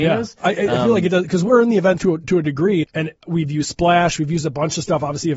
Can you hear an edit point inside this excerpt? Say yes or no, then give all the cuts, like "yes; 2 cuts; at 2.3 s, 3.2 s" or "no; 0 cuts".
yes; 3 cuts; at 2.0 s, 2.8 s, 3.2 s